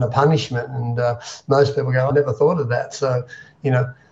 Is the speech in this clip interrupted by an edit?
yes; 1 cut; at 2.1 s

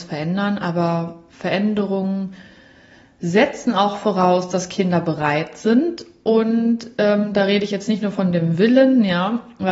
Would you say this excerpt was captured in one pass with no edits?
yes; 0 cuts

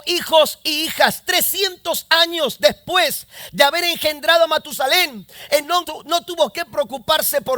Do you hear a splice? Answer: yes; 1 cut; at 5.8 s

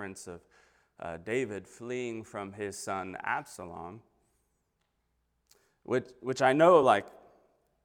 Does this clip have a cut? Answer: no; 0 cuts

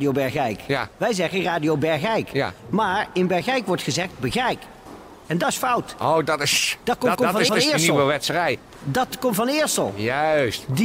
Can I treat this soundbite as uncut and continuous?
no; 2 cuts; at 7.1 s, 7.5 s

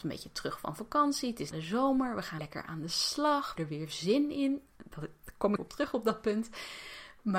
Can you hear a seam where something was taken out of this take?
yes; 4 cuts; at 1.5 s, 2.4 s, 3.6 s, 5.6 s

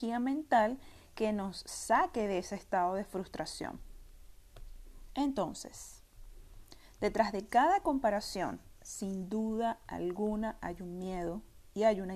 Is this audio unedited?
yes; 0 cuts

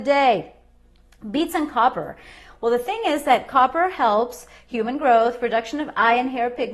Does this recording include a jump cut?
no; 0 cuts

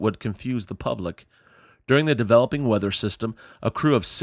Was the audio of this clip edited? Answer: no; 0 cuts

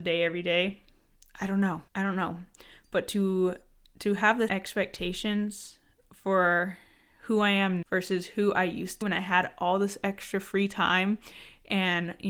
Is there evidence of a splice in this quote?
yes; 4 cuts; at 1.9 s, 4.5 s, 7.8 s, 9.0 s

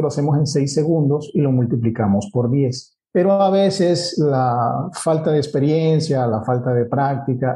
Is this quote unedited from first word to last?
yes; 0 cuts

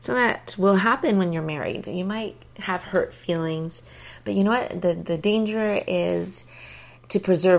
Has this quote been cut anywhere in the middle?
no; 0 cuts

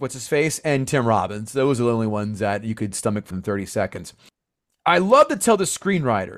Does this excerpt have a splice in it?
yes; 1 cut; at 3.3 s

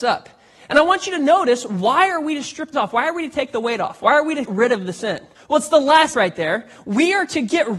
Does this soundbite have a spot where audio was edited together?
yes; 4 cuts; at 2.7 s, 4.5 s, 5.4 s, 6.1 s

